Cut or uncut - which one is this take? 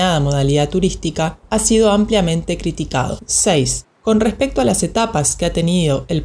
uncut